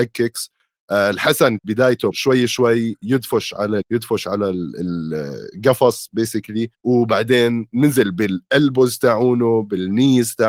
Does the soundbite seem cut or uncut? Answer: cut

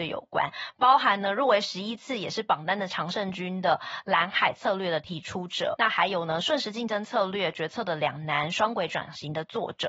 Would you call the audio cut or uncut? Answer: cut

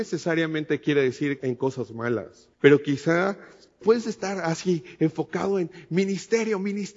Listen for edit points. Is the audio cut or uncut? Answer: cut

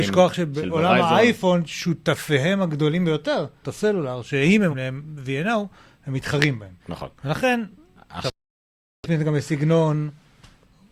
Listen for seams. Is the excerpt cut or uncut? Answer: cut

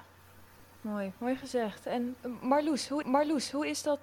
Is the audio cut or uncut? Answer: cut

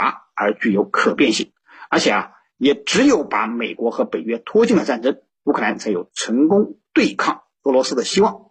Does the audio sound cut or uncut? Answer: uncut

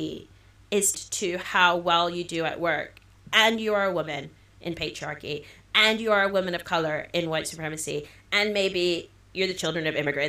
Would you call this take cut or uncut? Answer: cut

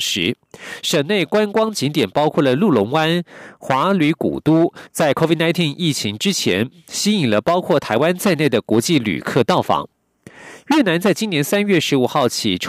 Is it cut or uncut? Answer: cut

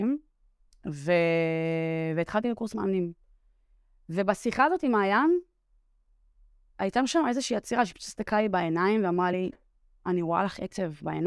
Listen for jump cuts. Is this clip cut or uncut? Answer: uncut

